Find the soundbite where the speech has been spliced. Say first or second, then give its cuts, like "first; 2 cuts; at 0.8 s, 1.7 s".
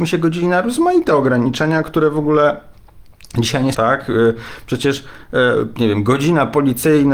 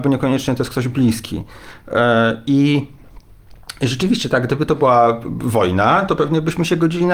first; 1 cut; at 3.7 s